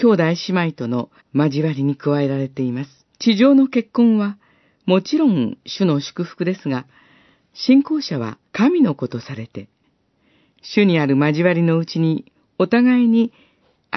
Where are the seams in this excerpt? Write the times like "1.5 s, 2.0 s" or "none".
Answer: 1.2 s, 3.1 s, 8.5 s